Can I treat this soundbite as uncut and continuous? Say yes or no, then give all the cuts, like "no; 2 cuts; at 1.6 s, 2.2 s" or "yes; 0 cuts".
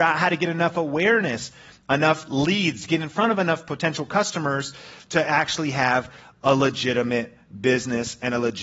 yes; 0 cuts